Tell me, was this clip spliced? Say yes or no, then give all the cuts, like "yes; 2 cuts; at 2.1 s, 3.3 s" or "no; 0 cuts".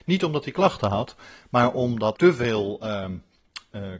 yes; 1 cut; at 2.1 s